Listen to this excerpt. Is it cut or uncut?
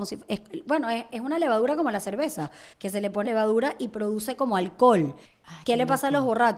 cut